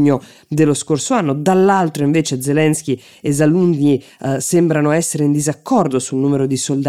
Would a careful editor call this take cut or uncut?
uncut